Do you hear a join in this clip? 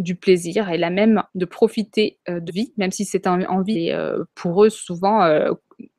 yes; 3 cuts; at 1.3 s, 2.5 s, 3.7 s

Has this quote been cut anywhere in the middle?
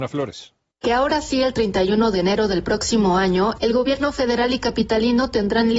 no; 0 cuts

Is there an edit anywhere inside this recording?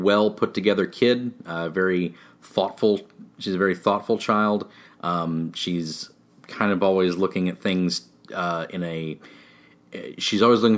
no; 0 cuts

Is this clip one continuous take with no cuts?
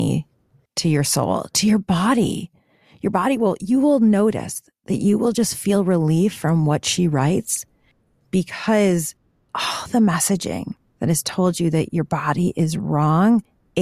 yes; 0 cuts

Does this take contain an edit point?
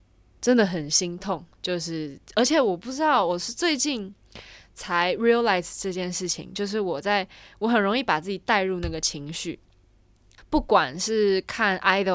no; 0 cuts

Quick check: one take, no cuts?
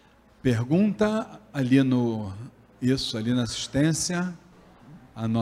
yes; 0 cuts

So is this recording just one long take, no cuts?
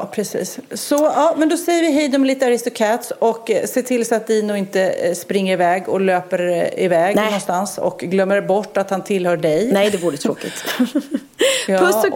yes; 0 cuts

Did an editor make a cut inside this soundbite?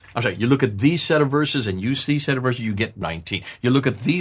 yes; 1 cut; at 3.0 s

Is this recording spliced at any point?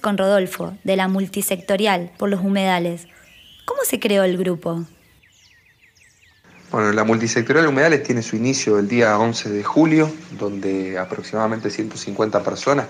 no; 0 cuts

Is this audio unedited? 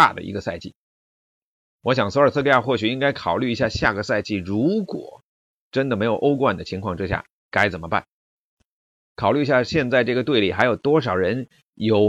yes; 0 cuts

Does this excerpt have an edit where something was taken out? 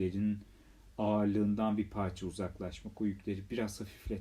no; 0 cuts

